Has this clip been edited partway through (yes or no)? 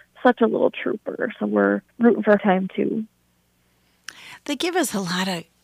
yes